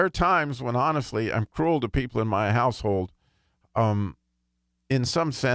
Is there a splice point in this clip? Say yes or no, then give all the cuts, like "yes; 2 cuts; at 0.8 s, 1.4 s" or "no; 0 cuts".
no; 0 cuts